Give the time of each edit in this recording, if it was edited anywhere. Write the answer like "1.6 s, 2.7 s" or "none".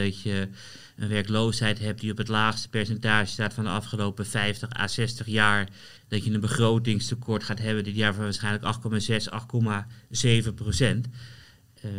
6.0 s